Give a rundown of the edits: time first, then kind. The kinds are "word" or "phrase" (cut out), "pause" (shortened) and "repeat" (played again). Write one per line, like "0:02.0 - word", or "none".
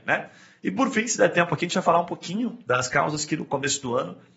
none